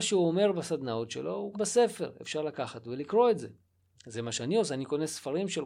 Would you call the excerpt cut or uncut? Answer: cut